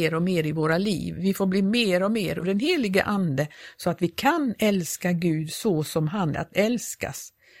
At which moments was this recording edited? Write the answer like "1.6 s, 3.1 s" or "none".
2.4 s, 6.3 s

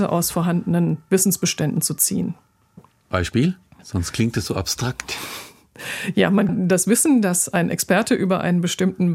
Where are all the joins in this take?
6.5 s

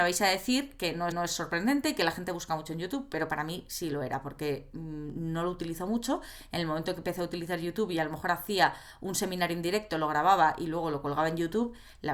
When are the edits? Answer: 1.1 s

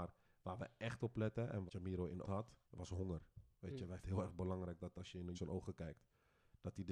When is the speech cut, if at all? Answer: 1.7 s, 2.2 s, 2.6 s, 4.0 s, 5.3 s

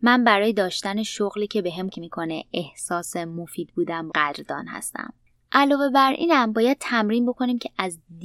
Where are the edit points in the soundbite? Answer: 1.9 s, 4.1 s, 5.2 s

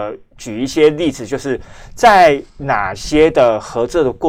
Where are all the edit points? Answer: 2.5 s

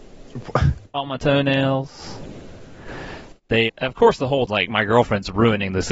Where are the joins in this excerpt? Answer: 0.9 s, 3.7 s, 4.5 s

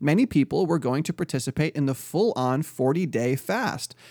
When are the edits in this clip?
none

